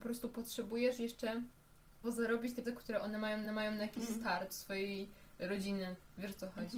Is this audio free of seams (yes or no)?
no